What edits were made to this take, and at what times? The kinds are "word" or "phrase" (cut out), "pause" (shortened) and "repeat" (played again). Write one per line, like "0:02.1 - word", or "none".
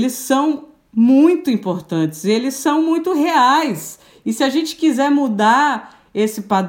none